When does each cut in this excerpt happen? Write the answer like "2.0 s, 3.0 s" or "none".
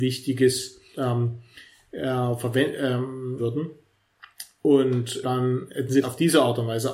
0.9 s, 3.4 s, 5.2 s, 6.0 s